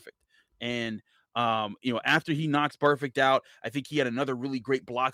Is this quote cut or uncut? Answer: uncut